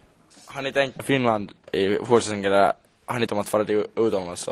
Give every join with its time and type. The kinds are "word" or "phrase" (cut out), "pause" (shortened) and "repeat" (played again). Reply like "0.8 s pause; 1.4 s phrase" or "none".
1.0 s word; 3.3 s word

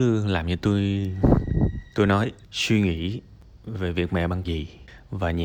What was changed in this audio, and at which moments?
1.9 s pause; 2.4 s pause; 4.4 s word

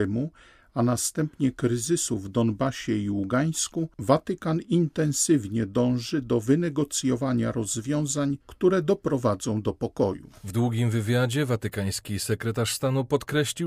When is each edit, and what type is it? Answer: 8.4 s pause

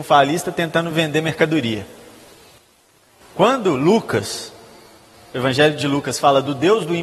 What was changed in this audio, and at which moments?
none

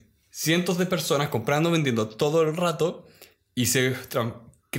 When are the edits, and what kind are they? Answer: none

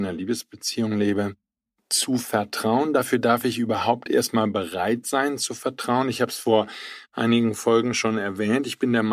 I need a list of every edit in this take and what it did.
none

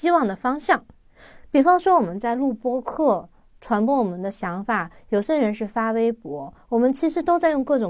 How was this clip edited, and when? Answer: none

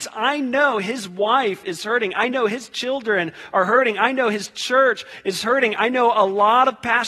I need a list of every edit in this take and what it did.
none

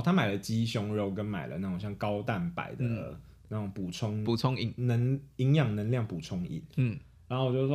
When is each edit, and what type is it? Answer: none

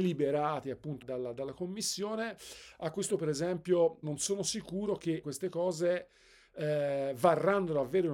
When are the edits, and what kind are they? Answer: 1.0 s word; 3.1 s word; 4.0 s word; 5.2 s word

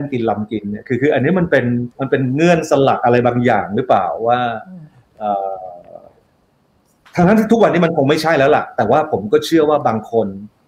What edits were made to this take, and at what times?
1.9 s pause

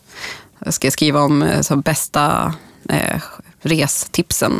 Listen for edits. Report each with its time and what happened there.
none

